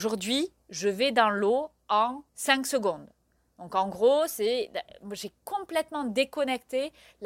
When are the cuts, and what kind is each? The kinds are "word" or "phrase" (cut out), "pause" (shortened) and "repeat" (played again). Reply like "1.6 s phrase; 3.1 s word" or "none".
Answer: 2.3 s pause

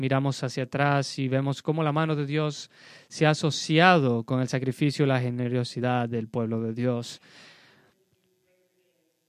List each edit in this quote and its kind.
none

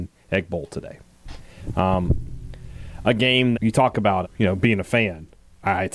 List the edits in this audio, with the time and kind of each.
3.5 s word; 4.2 s word

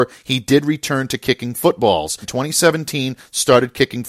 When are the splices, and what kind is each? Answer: 2.2 s word

